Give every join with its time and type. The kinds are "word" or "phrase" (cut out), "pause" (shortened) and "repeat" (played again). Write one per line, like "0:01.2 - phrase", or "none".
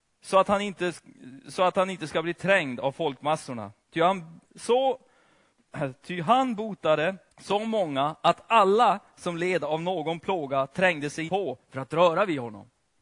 0:03.8 - pause
0:04.4 - word
0:07.3 - pause
0:11.3 - word